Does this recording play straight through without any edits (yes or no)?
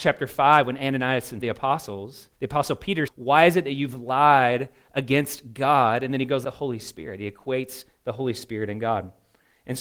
no